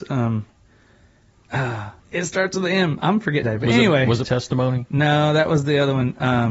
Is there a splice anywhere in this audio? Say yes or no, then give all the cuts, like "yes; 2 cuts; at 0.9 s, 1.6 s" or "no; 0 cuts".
yes; 3 cuts; at 2.0 s, 3.4 s, 4.2 s